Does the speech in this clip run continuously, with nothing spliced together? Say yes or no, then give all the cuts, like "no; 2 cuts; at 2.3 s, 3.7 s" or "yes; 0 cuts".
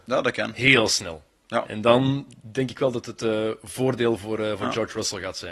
yes; 0 cuts